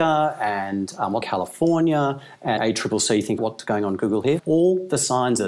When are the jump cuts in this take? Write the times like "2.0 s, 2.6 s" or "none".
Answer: 1.2 s, 2.6 s, 3.4 s, 4.4 s

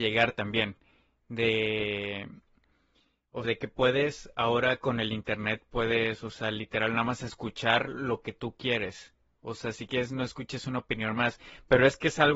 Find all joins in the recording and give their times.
3.4 s

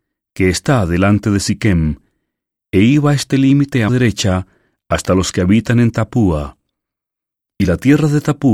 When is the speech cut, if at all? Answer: 3.9 s

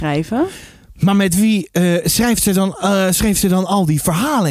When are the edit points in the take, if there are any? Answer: none

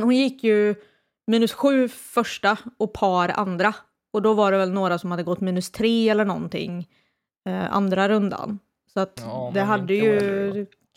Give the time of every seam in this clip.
none

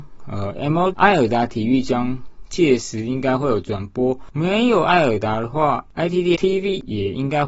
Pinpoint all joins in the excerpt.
0.9 s, 6.3 s

